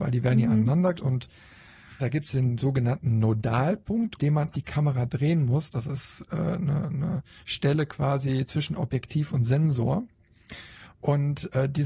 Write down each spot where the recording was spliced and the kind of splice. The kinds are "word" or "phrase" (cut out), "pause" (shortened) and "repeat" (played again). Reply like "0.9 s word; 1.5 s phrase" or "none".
0.9 s word; 2.0 s word; 4.2 s word; 4.5 s word